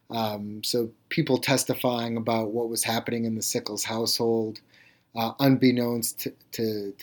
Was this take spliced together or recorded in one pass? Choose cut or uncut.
uncut